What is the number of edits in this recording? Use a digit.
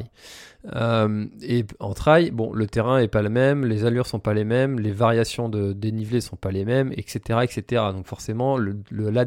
0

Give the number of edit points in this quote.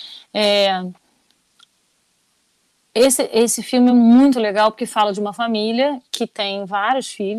0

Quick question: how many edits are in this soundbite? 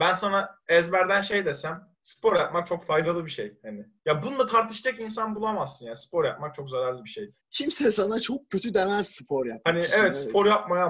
3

